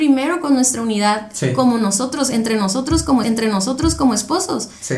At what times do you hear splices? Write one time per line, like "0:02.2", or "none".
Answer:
0:03.2